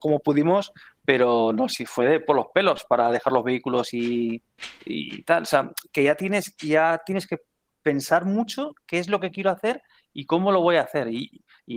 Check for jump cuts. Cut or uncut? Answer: uncut